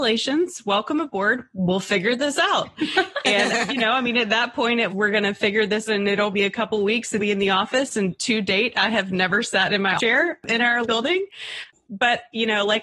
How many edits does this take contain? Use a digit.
6